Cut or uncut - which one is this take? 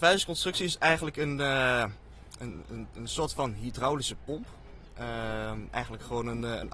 uncut